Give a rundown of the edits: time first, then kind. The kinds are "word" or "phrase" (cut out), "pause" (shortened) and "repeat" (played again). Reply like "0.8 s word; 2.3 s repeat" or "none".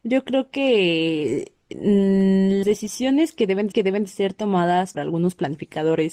2.6 s word; 3.7 s repeat; 4.9 s word